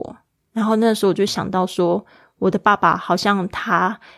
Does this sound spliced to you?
no; 0 cuts

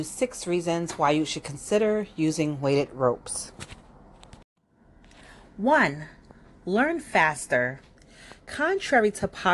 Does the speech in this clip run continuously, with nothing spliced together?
yes; 0 cuts

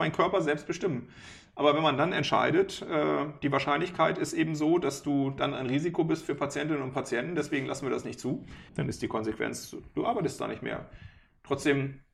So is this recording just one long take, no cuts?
no; 1 cut; at 8.7 s

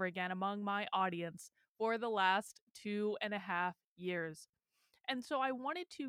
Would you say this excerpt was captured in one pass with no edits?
yes; 0 cuts

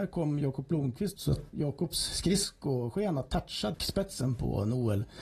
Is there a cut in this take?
yes; 3 cuts; at 1.2 s, 1.5 s, 3.7 s

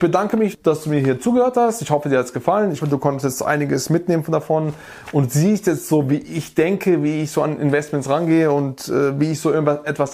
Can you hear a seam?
yes; 1 cut; at 2.8 s

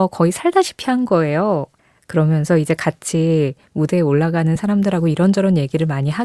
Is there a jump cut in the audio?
no; 0 cuts

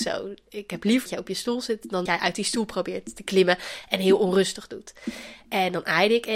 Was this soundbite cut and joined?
yes; 2 cuts; at 1.1 s, 2.1 s

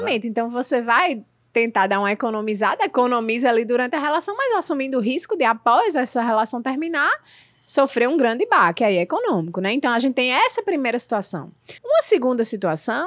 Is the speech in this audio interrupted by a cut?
yes; 1 cut; at 11.8 s

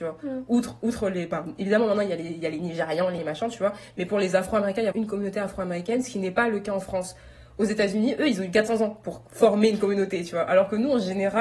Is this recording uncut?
no; 2 cuts; at 3.2 s, 4.9 s

